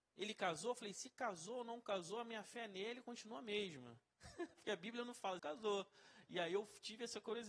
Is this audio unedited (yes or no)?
no